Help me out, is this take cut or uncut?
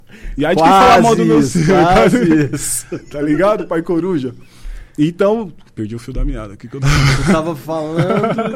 uncut